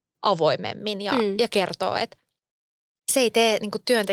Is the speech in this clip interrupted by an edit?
no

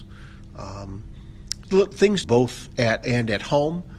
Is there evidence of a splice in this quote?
yes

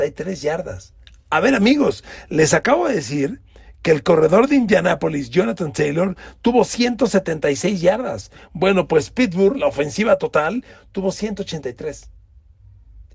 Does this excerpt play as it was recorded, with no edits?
yes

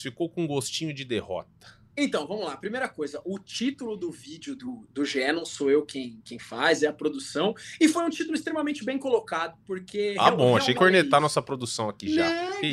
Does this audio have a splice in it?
yes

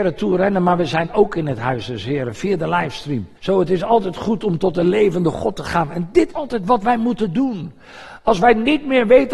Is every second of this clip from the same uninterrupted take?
no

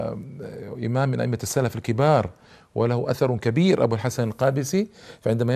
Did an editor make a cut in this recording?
no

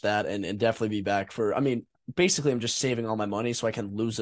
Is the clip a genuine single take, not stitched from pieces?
yes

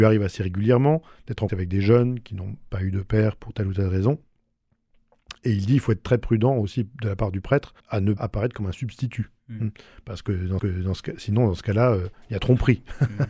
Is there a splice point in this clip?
yes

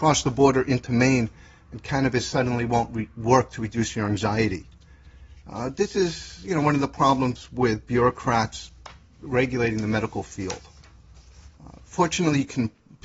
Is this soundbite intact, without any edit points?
yes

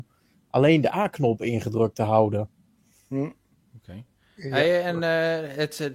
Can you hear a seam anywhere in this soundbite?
no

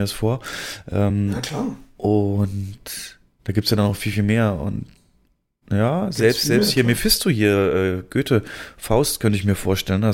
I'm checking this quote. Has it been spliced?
no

